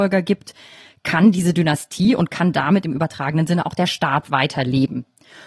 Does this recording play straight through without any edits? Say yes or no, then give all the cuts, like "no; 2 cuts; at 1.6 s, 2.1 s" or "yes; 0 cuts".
yes; 0 cuts